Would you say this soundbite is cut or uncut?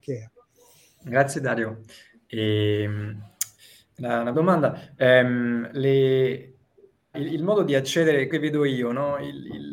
cut